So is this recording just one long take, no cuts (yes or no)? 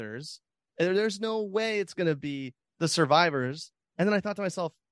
yes